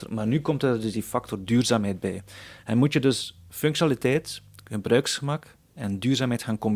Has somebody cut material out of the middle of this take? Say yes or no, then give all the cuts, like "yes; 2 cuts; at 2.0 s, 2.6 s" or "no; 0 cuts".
no; 0 cuts